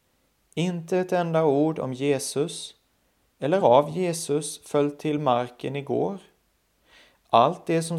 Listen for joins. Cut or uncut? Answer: uncut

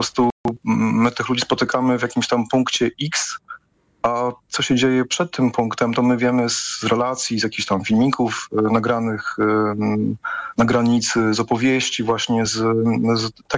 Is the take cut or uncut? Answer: uncut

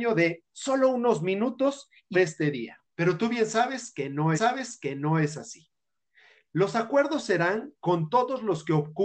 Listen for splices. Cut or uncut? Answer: cut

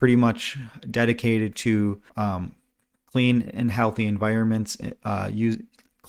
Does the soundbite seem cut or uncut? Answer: cut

